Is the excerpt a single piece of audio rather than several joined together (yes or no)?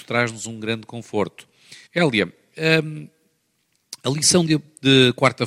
no